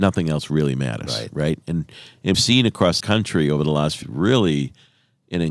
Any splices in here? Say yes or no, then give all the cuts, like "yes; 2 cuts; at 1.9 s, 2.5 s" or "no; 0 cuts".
yes; 3 cuts; at 2.3 s, 3.0 s, 4.0 s